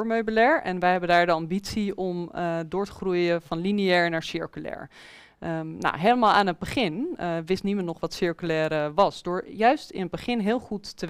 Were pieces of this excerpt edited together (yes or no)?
no